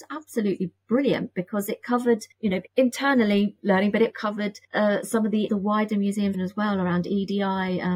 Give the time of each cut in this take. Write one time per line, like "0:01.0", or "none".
0:02.3
0:02.7
0:03.6
0:04.1
0:04.6
0:05.5
0:06.3